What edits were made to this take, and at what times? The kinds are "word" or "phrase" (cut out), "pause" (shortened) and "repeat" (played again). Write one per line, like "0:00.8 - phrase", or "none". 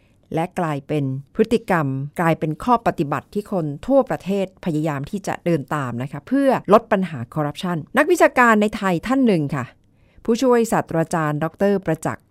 0:01.3 - pause
0:02.1 - pause
0:06.6 - pause
0:07.9 - pause